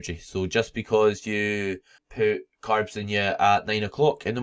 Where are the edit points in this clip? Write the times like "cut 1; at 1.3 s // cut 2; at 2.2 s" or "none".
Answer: cut 1; at 2.0 s